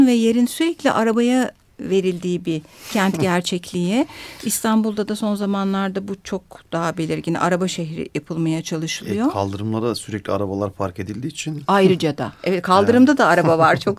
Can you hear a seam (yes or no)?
no